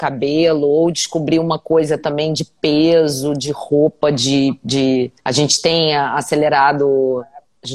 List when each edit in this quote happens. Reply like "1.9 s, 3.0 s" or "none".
5.2 s